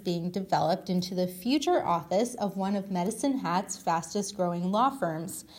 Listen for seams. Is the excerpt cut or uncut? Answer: uncut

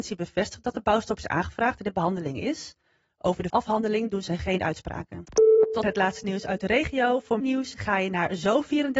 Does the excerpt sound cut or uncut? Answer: cut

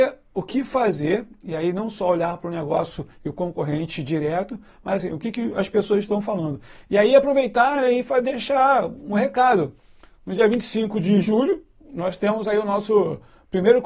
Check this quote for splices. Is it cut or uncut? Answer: uncut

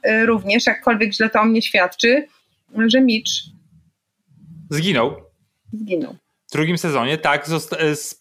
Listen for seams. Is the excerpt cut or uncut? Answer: uncut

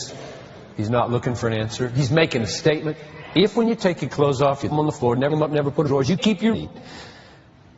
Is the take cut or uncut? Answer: cut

